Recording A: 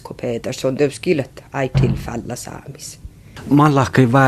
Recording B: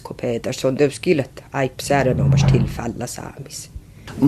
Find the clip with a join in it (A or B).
A